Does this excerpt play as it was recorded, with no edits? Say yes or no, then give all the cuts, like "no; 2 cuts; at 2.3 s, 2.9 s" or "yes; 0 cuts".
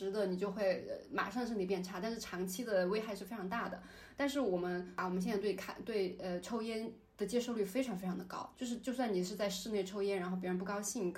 no; 1 cut; at 8.5 s